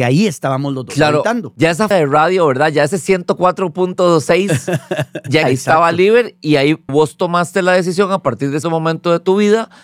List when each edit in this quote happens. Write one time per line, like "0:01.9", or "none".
0:01.9
0:05.4
0:06.9
0:08.6